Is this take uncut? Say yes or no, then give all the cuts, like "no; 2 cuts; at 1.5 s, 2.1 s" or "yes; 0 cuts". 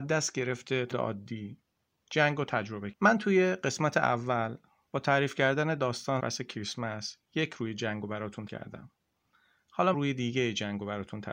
no; 5 cuts; at 0.9 s, 2.9 s, 6.2 s, 8.5 s, 9.9 s